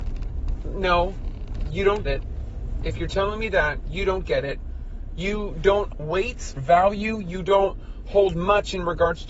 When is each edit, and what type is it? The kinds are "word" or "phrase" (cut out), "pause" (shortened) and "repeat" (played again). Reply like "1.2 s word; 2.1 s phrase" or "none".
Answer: 2.1 s word; 5.9 s word; 6.6 s word